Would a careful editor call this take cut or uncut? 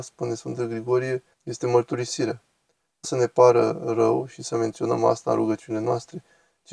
cut